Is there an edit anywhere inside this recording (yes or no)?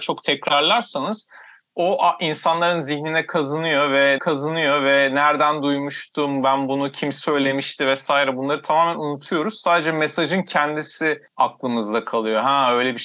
yes